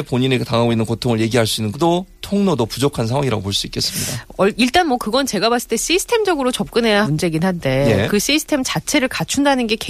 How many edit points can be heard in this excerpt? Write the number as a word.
two